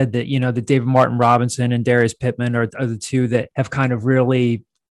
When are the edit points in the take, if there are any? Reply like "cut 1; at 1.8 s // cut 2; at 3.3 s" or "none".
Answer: cut 1; at 3.5 s

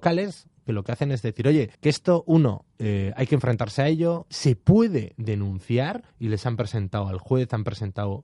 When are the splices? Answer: cut 1; at 1.7 s // cut 2; at 6.1 s

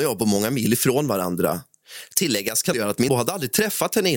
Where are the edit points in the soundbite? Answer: cut 1; at 2.7 s // cut 2; at 3.1 s

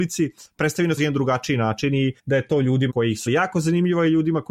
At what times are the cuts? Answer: cut 1; at 1.0 s // cut 2; at 2.2 s // cut 3; at 2.9 s // cut 4; at 3.3 s

